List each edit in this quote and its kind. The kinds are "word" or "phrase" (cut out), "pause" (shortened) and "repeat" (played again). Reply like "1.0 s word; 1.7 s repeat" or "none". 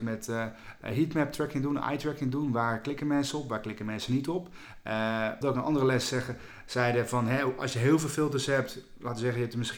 5.4 s word